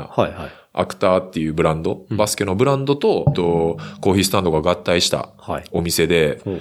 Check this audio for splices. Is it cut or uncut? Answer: cut